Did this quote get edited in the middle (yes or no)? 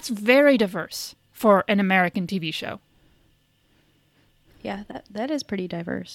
no